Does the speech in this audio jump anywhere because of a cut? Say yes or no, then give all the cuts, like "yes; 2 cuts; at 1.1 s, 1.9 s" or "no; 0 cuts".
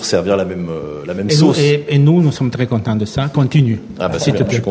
no; 0 cuts